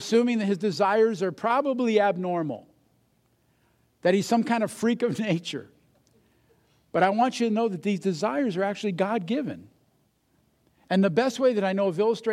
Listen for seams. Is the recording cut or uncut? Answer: uncut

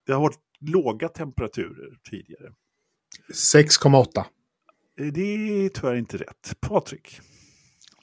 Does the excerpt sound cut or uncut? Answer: uncut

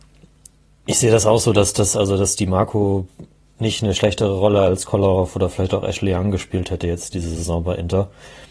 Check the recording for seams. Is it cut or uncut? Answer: uncut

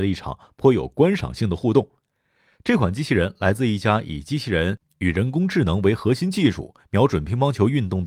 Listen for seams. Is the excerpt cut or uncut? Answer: uncut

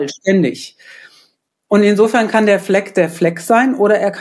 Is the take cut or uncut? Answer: uncut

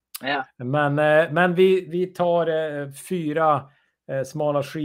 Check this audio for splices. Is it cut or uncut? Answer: uncut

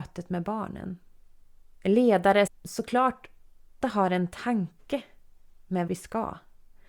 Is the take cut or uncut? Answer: cut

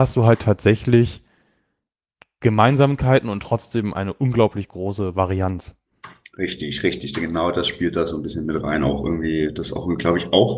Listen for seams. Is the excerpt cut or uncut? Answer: uncut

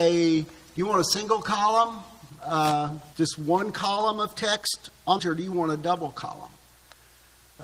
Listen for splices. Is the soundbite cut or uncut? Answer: cut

